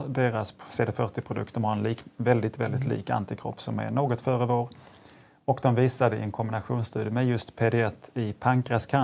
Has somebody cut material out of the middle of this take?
no; 0 cuts

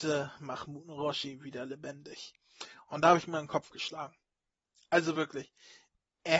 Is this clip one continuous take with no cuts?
yes; 0 cuts

